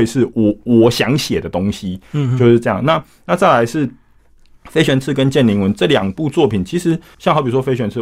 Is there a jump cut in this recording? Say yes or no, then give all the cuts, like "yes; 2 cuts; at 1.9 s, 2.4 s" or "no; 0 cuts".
no; 0 cuts